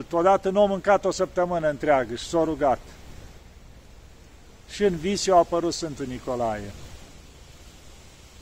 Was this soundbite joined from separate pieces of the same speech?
no; 0 cuts

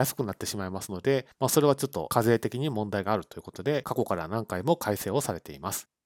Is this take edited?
yes; 1 cut; at 1.3 s

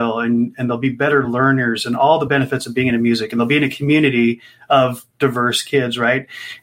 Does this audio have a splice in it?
no; 0 cuts

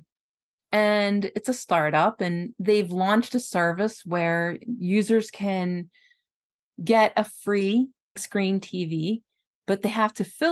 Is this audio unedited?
no; 1 cut; at 8.2 s

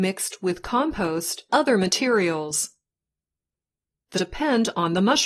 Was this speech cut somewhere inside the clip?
yes; 2 cuts; at 1.5 s, 4.1 s

